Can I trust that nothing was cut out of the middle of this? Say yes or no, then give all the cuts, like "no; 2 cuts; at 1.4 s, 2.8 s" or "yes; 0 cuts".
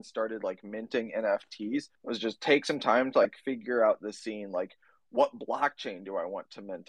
no; 1 cut; at 1.9 s